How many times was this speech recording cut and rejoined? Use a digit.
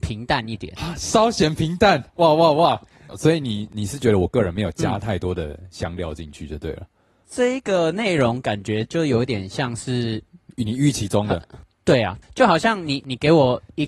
1